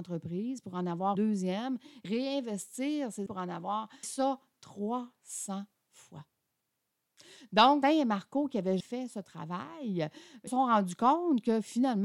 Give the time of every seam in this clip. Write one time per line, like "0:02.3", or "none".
0:01.1
0:02.0
0:03.3
0:04.0
0:07.8
0:08.8
0:10.5